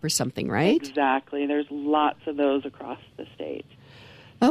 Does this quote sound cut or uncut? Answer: uncut